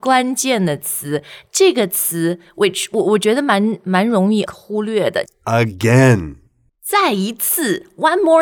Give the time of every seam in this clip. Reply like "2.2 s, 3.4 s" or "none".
4.5 s, 5.3 s